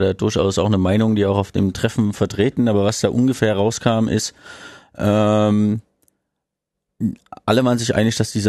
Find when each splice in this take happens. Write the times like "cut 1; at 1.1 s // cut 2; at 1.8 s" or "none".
none